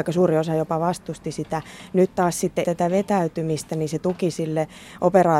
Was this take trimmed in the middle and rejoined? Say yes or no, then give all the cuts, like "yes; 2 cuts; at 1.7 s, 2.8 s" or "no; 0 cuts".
yes; 1 cut; at 2.6 s